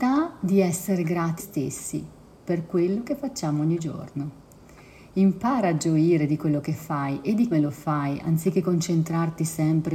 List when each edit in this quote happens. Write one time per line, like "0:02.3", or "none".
0:01.4
0:07.5